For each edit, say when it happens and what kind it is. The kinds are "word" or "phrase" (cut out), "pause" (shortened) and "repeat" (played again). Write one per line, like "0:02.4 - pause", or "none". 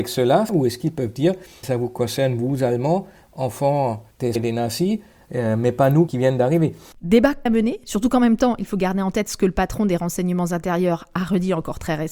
0:01.6 - word
0:04.4 - word
0:06.1 - word
0:07.5 - word